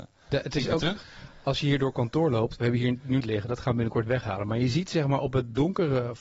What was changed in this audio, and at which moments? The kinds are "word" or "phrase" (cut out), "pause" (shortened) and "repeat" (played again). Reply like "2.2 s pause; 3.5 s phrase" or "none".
3.2 s phrase